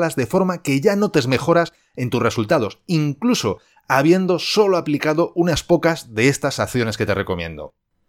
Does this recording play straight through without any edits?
yes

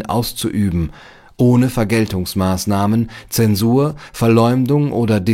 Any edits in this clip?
no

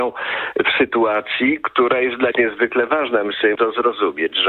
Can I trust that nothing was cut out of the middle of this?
no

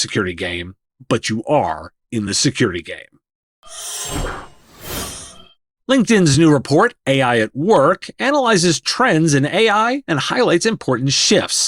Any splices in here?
no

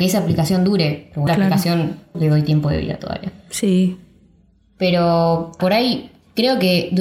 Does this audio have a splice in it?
yes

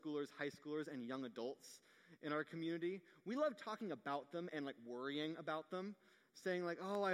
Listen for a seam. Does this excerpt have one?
no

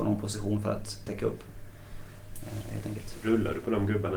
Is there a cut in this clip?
yes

